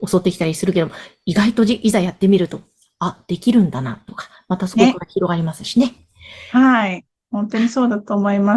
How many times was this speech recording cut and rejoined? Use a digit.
0